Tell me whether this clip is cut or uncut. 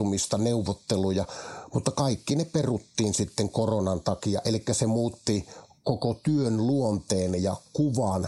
uncut